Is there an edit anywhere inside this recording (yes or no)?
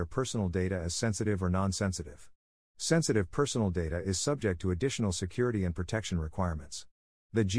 no